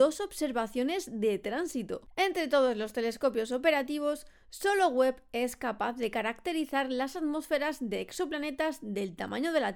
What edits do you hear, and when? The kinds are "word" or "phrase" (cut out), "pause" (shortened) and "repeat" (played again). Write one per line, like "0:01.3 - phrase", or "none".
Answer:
none